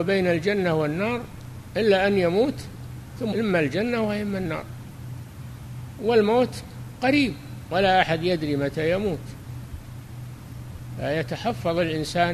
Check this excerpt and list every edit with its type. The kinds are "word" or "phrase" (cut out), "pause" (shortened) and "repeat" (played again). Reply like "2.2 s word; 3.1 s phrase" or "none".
3.3 s word